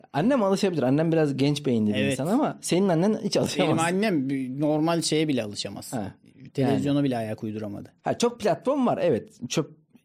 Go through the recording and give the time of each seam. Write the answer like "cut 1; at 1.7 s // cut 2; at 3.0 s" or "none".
cut 1; at 8.0 s